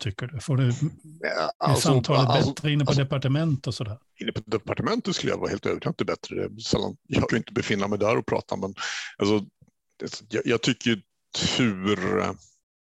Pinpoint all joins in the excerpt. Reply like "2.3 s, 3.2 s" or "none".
4.1 s, 7.3 s